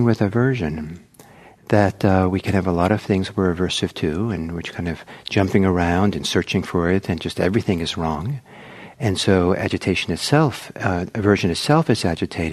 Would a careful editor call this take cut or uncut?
uncut